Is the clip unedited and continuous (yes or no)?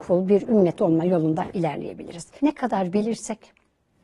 yes